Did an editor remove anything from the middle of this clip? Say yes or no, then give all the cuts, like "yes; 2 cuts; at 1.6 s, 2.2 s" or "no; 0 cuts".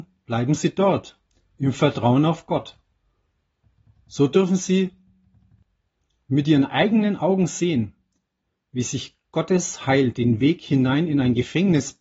no; 0 cuts